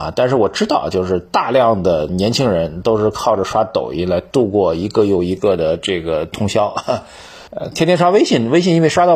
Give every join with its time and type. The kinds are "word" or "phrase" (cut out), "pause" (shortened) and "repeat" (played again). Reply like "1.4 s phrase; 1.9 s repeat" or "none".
7.5 s pause